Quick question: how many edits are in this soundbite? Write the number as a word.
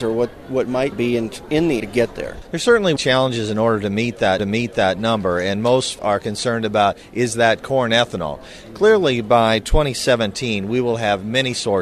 five